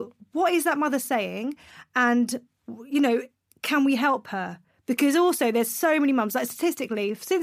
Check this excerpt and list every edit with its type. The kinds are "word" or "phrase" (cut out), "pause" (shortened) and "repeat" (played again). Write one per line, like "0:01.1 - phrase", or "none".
none